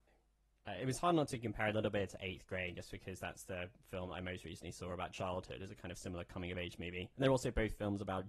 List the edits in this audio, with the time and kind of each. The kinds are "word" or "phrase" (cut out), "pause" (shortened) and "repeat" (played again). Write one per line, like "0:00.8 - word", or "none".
none